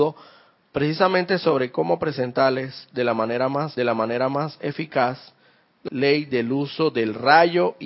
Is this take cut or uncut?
cut